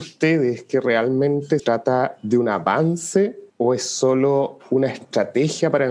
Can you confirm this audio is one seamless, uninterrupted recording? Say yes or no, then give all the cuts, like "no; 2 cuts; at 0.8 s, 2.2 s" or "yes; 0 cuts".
no; 2 cuts; at 1.6 s, 3.5 s